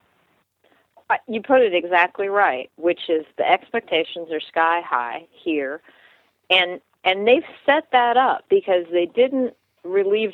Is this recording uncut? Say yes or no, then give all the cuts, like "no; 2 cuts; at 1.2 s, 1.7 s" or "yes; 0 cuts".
yes; 0 cuts